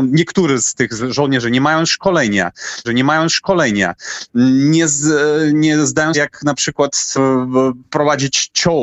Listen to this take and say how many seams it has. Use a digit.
3